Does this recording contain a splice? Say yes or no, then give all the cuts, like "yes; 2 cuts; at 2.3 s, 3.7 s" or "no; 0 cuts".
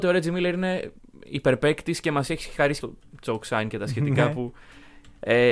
yes; 2 cuts; at 1.0 s, 2.8 s